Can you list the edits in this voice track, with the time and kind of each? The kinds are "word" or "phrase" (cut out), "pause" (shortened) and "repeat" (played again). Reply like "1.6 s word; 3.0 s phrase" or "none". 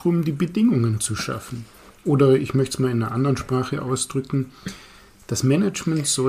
none